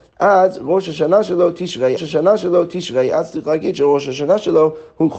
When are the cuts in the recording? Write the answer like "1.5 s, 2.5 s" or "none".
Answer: 2.0 s